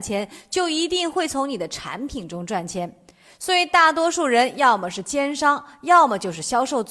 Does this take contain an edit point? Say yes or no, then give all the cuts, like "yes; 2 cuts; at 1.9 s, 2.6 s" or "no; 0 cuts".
no; 0 cuts